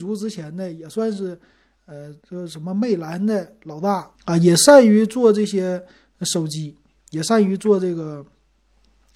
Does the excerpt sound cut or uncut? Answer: cut